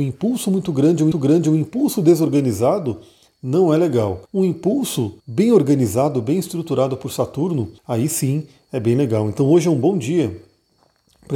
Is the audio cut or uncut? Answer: cut